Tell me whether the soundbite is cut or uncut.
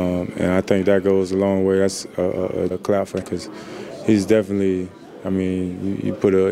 cut